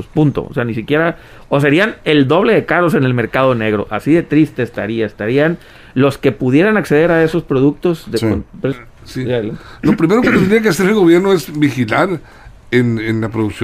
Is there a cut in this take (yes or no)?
yes